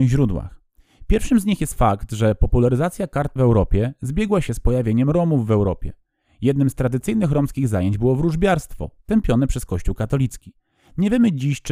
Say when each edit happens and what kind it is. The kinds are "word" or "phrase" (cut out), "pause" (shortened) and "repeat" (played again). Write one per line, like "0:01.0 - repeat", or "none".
0:03.4 - word